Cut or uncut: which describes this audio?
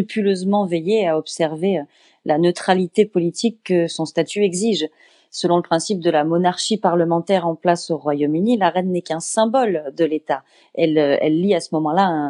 uncut